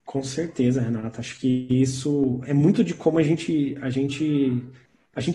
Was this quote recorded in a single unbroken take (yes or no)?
no